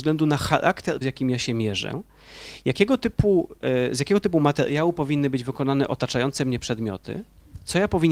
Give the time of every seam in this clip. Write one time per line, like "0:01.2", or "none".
0:01.0